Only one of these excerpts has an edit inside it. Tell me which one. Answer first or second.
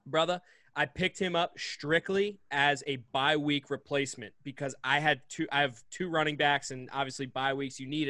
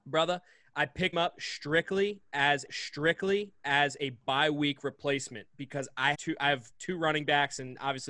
second